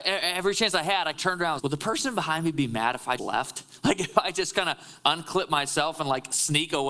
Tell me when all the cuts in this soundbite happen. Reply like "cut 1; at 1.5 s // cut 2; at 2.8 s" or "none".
cut 1; at 1.1 s // cut 2; at 1.6 s // cut 3; at 3.2 s